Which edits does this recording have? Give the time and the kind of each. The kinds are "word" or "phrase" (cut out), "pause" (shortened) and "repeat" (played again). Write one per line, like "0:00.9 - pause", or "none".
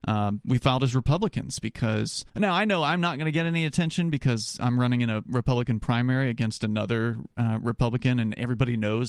0:02.3 - pause